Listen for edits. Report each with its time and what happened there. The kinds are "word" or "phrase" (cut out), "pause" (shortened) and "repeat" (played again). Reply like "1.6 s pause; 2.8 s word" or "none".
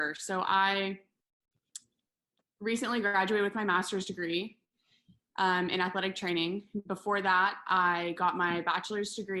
none